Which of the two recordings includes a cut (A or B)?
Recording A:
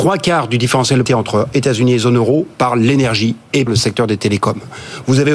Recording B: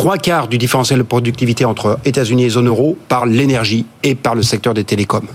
A